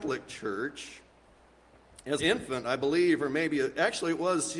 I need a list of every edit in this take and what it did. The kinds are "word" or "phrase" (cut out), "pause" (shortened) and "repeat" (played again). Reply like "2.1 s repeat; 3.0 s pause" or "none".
2.2 s word